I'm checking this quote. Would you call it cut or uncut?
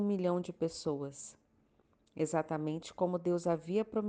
uncut